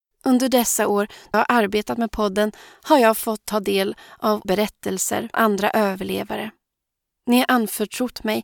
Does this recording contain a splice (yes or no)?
yes